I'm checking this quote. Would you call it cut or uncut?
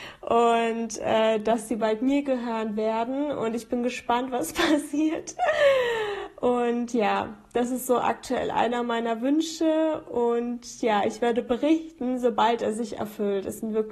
uncut